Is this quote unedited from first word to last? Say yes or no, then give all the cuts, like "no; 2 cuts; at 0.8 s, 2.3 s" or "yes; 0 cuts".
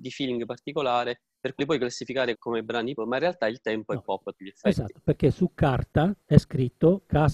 no; 5 cuts; at 1.6 s, 2.3 s, 3.0 s, 4.3 s, 6.2 s